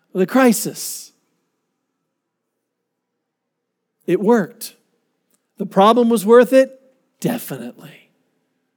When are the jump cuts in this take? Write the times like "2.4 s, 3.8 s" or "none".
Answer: none